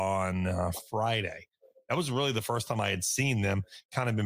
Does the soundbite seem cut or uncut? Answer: uncut